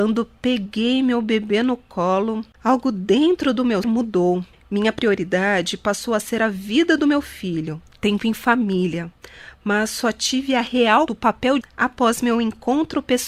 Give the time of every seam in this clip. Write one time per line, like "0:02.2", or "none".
0:02.5
0:03.8
0:11.1
0:11.6